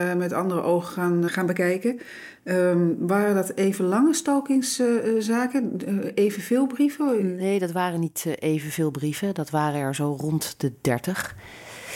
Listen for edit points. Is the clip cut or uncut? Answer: cut